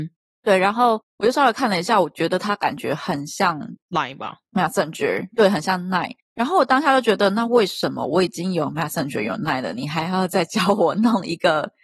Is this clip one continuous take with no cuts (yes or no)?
yes